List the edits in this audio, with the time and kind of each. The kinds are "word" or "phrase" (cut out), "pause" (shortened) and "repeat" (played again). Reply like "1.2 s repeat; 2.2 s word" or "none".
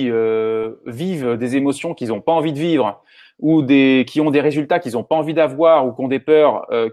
none